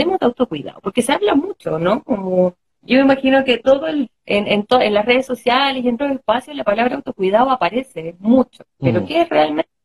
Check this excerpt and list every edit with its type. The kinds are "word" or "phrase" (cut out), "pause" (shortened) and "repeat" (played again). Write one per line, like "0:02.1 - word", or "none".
0:04.1 - word
0:06.0 - word

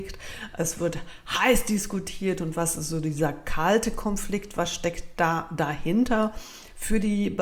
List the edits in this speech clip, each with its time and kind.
none

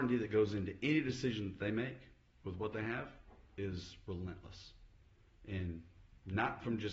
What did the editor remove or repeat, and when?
none

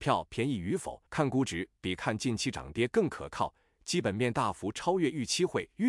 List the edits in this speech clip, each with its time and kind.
0:01.1 - pause

